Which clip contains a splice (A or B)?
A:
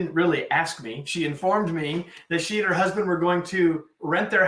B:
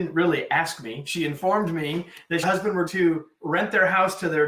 B